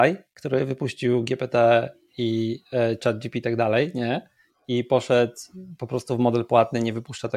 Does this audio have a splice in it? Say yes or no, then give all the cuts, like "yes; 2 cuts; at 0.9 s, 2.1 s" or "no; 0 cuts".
yes; 1 cut; at 3.4 s